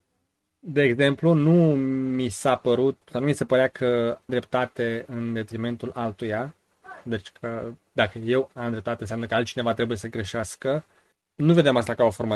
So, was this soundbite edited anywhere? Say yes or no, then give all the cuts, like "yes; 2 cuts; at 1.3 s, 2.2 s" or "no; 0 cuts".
yes; 2 cuts; at 3.0 s, 4.3 s